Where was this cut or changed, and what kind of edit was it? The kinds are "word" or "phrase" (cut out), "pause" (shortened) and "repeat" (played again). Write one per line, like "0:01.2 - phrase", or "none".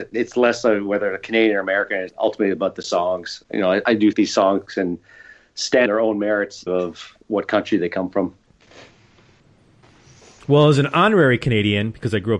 0:02.1 - word
0:03.4 - word
0:04.1 - word
0:05.9 - word
0:06.7 - word